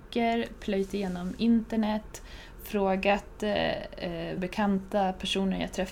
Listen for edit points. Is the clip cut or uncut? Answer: cut